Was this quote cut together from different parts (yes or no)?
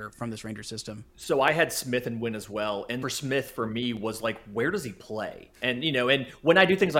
yes